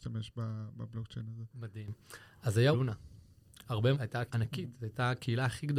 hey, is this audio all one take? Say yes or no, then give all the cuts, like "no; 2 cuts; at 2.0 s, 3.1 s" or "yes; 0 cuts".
no; 3 cuts; at 2.7 s, 3.9 s, 4.3 s